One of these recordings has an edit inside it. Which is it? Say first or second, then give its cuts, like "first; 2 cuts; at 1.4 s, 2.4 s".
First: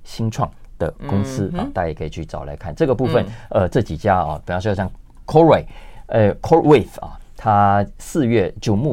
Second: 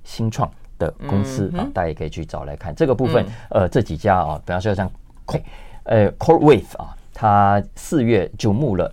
second; 1 cut; at 5.3 s